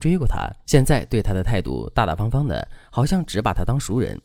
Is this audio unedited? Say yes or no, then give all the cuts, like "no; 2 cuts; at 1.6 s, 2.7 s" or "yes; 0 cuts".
yes; 0 cuts